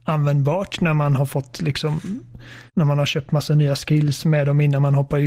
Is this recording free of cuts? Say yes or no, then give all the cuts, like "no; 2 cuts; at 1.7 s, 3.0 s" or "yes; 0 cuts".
no; 2 cuts; at 2.7 s, 4.2 s